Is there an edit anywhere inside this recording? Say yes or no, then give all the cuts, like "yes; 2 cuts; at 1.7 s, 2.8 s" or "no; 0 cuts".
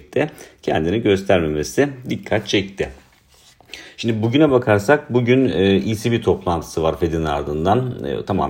no; 0 cuts